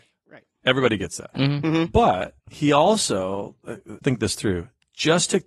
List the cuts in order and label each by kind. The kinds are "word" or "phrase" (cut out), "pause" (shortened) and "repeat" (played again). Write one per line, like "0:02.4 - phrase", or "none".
0:01.3 - word
0:02.4 - pause
0:04.0 - word